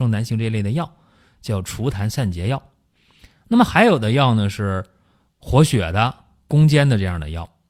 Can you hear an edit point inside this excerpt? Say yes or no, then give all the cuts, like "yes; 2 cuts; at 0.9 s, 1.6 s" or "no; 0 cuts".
no; 0 cuts